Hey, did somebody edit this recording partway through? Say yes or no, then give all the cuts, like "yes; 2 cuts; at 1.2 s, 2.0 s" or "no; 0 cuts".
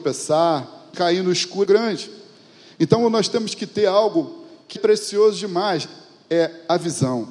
yes; 3 cuts; at 0.9 s, 1.6 s, 4.8 s